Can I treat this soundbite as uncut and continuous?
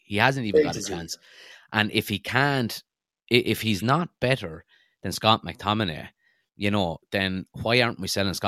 yes; 0 cuts

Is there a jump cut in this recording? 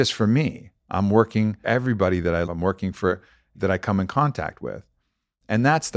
yes; 3 cuts; at 1.6 s, 2.4 s, 3.5 s

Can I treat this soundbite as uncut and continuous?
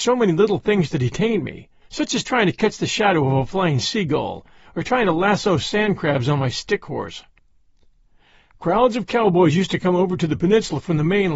yes; 0 cuts

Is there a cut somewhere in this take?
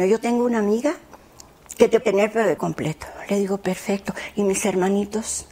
yes; 2 cuts; at 2.0 s, 2.6 s

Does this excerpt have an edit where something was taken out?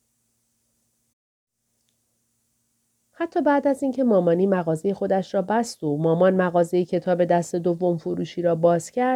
no; 0 cuts

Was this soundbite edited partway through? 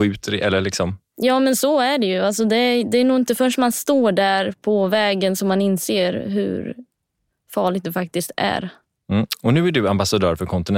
no; 0 cuts

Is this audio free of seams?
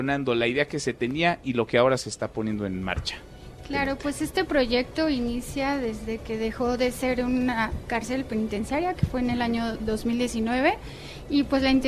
no; 1 cut; at 9.8 s

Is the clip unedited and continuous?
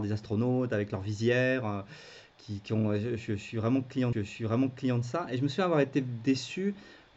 no; 1 cut; at 4.1 s

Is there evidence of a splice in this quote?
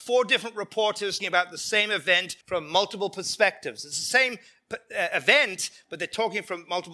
yes; 2 cuts; at 1.2 s, 2.4 s

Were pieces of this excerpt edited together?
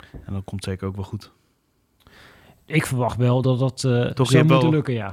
no; 0 cuts

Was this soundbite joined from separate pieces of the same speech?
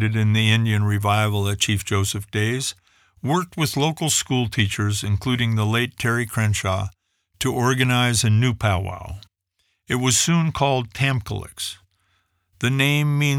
no; 0 cuts

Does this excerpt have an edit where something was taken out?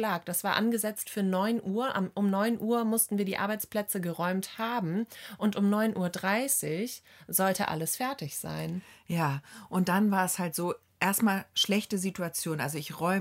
no; 0 cuts

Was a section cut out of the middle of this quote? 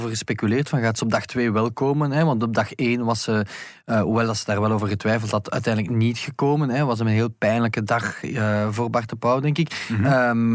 no; 0 cuts

